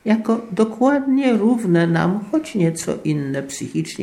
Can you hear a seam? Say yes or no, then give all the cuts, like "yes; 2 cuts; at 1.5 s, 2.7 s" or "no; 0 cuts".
no; 0 cuts